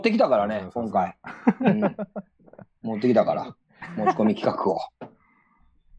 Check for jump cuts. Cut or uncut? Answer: uncut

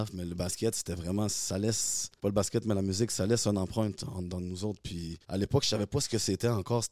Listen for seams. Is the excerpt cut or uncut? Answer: cut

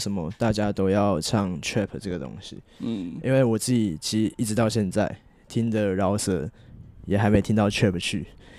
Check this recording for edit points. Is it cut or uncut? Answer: uncut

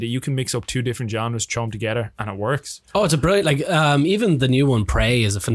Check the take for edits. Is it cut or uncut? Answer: uncut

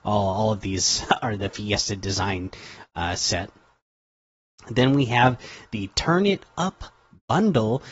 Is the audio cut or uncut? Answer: uncut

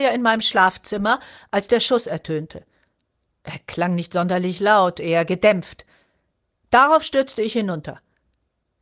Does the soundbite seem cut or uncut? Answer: uncut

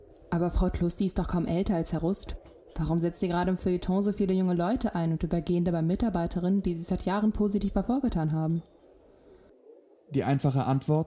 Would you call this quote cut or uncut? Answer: uncut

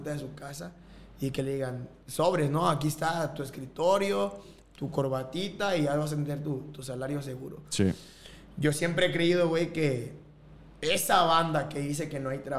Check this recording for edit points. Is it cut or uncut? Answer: uncut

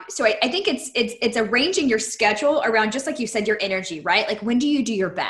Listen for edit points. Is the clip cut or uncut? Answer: uncut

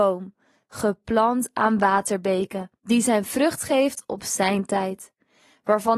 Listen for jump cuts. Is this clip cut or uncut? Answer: cut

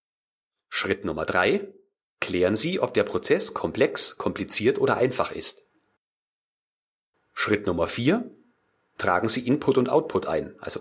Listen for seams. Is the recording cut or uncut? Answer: uncut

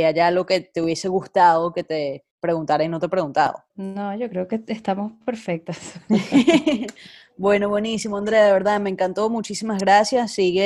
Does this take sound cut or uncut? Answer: cut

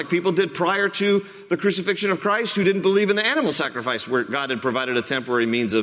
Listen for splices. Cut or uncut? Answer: uncut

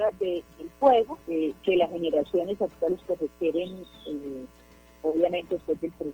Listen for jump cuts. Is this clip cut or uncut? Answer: cut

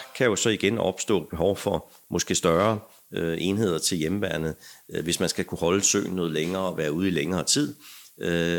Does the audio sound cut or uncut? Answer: uncut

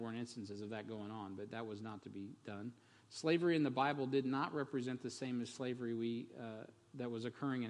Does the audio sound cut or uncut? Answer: uncut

